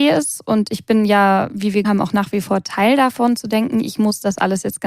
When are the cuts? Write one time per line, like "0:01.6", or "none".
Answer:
0:01.8